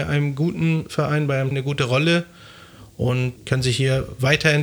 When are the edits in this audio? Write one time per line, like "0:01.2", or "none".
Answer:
0:01.5
0:03.4